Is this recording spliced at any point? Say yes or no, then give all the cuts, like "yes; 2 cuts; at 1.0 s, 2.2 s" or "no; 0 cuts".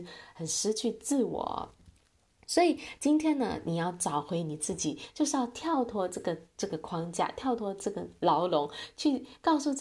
no; 0 cuts